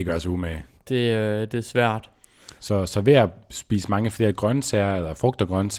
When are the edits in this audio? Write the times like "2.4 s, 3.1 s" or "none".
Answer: none